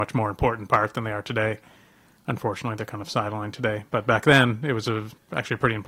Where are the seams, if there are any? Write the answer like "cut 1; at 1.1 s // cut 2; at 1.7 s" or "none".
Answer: none